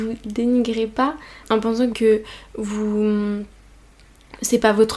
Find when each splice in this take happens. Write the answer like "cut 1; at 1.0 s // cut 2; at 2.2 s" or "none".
cut 1; at 1.4 s // cut 2; at 1.9 s